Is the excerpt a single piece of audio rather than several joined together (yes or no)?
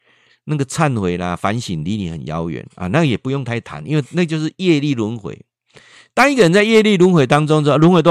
yes